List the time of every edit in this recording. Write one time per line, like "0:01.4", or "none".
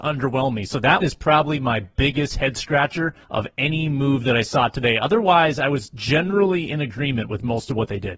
0:01.0
0:03.2